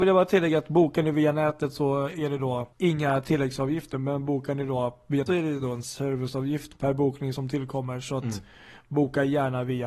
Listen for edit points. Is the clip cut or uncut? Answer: cut